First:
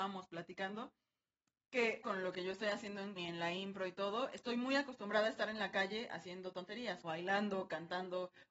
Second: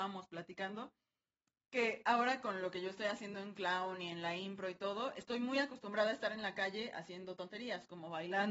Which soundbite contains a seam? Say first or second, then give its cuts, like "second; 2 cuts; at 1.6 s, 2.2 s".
first; 3 cuts; at 2.0 s, 3.2 s, 7.0 s